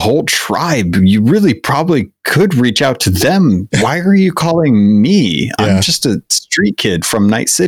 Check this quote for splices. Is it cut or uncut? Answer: uncut